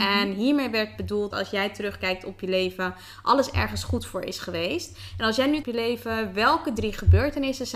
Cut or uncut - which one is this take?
cut